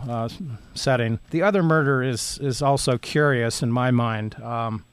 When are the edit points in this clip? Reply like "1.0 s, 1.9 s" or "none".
1.2 s